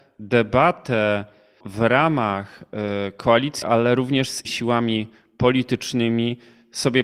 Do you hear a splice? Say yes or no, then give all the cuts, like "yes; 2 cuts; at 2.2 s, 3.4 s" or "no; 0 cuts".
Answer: yes; 3 cuts; at 1.6 s, 3.6 s, 4.4 s